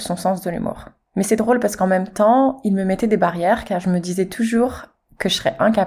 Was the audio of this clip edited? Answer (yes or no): no